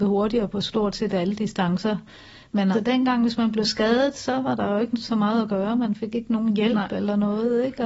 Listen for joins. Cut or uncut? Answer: cut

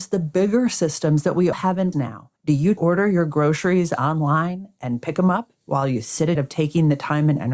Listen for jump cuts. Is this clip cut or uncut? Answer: cut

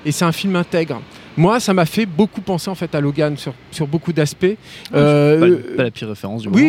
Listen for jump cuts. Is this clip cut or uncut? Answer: uncut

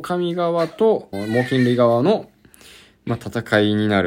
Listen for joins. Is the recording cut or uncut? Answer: cut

